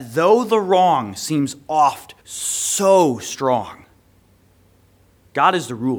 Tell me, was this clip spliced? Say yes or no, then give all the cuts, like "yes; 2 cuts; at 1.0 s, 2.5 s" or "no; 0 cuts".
yes; 1 cut; at 2.2 s